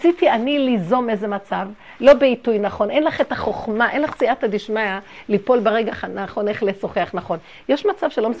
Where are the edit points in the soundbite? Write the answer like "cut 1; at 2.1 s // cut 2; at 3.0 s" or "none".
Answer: none